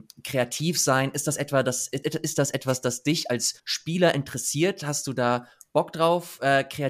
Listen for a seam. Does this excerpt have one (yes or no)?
yes